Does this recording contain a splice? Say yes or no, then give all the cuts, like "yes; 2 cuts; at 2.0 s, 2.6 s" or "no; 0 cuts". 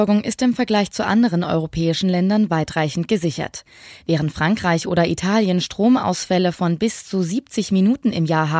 no; 0 cuts